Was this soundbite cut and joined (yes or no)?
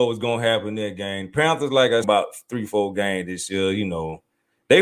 yes